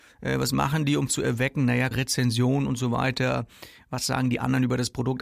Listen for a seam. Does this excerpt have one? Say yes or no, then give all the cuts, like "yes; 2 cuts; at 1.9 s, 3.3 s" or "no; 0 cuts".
yes; 2 cuts; at 1.1 s, 1.9 s